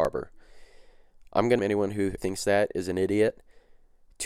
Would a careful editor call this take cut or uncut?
cut